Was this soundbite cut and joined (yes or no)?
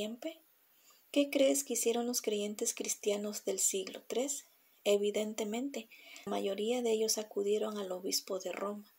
yes